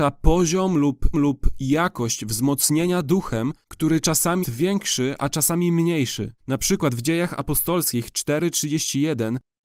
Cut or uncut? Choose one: cut